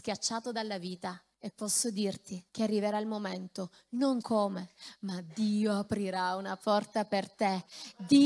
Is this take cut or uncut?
cut